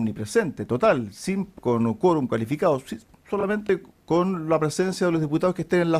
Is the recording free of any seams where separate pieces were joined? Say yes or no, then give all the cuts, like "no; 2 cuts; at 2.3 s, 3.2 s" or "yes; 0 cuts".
no; 1 cut; at 1.6 s